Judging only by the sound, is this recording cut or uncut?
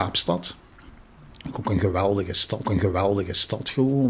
cut